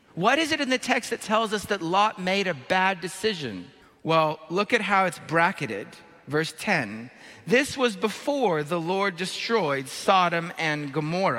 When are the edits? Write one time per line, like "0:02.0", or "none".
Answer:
0:03.8

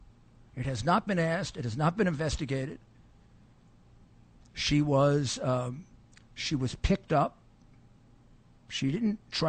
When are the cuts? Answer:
0:06.0

